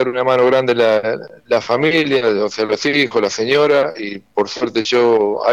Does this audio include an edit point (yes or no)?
no